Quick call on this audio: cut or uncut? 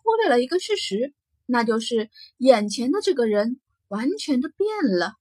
uncut